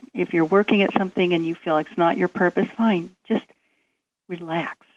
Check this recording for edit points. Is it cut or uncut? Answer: uncut